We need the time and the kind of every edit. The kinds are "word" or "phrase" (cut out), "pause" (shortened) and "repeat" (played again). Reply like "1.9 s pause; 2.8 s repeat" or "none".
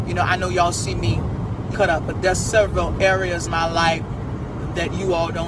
1.7 s word; 2.1 s word; 3.5 s word